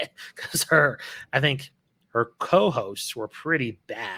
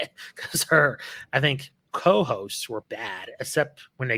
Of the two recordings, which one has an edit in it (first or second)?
second